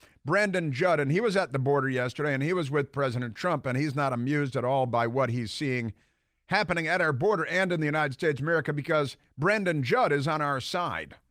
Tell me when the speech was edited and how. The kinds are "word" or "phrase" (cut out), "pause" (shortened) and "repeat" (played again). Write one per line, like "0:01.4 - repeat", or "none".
none